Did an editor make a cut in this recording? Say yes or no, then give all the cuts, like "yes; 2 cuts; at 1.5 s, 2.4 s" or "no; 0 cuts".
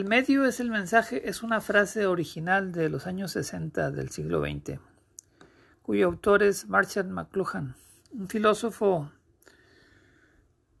no; 0 cuts